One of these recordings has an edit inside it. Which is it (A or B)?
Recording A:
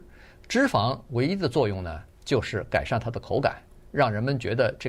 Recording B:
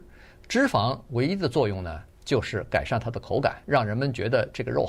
B